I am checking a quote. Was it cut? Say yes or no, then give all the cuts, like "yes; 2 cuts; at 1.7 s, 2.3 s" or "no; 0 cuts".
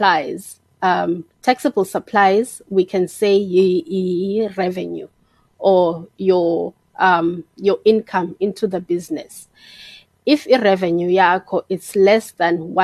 yes; 1 cut; at 1.3 s